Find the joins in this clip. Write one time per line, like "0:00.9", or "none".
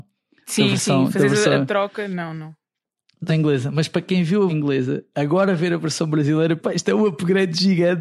0:03.3
0:04.5
0:06.6